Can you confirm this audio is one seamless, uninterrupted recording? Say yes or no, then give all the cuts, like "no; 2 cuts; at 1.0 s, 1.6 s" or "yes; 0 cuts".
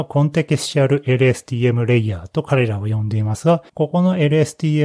no; 1 cut; at 3.7 s